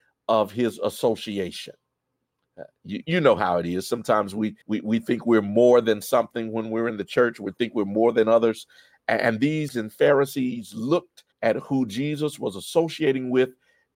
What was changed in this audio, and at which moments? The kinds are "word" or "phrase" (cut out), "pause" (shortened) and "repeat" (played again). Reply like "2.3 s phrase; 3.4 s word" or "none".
3.0 s word; 4.6 s pause; 9.7 s word; 11.3 s pause